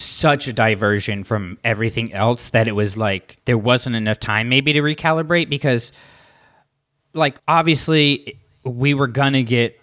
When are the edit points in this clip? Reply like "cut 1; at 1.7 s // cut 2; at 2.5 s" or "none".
cut 1; at 3.4 s // cut 2; at 7.4 s